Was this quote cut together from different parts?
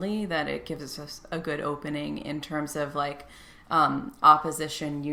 no; 0 cuts

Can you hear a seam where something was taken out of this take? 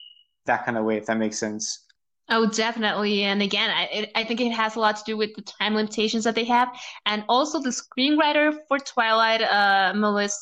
no; 0 cuts

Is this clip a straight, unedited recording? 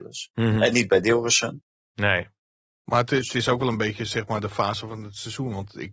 yes; 0 cuts

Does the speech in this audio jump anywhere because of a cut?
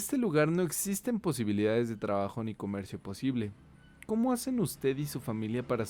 no; 0 cuts

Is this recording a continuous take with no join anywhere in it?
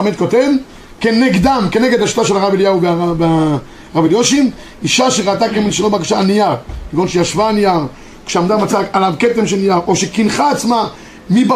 yes; 0 cuts

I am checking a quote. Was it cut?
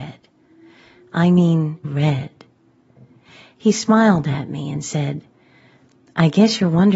yes; 1 cut; at 1.8 s

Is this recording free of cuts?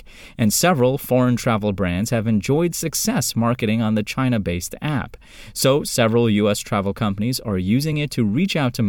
yes; 0 cuts

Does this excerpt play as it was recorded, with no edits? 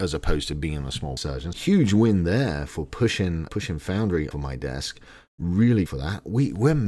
no; 6 cuts; at 1.2 s, 1.5 s, 2.7 s, 3.5 s, 4.3 s, 5.9 s

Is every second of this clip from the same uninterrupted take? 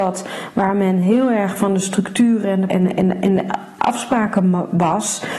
no; 1 cut; at 2.7 s

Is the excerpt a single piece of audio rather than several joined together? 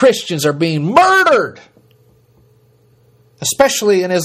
yes; 0 cuts

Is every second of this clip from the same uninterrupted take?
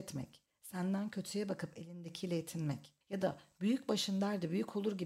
no; 1 cut; at 3.0 s

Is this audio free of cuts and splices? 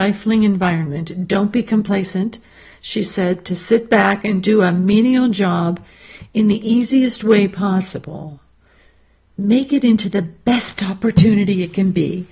yes; 0 cuts

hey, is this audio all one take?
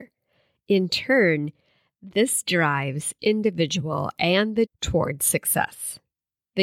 no; 2 cuts; at 3.2 s, 4.7 s

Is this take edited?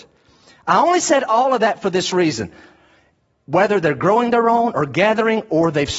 no; 0 cuts

